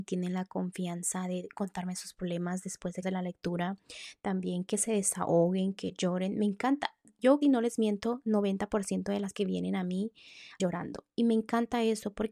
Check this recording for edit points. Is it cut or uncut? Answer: cut